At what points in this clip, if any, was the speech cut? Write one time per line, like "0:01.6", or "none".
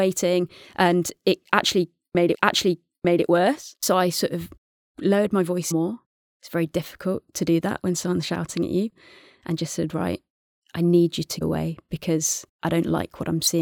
0:02.3
0:05.7
0:11.4
0:12.5